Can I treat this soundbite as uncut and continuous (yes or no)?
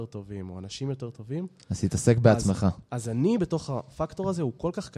yes